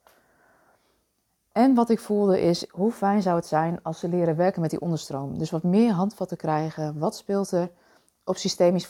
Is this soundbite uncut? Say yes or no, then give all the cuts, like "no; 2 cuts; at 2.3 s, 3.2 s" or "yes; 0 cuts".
yes; 0 cuts